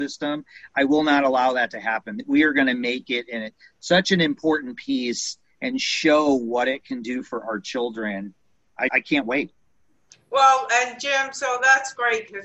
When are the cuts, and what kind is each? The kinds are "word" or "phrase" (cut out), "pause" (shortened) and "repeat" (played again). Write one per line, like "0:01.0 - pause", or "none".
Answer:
0:08.9 - word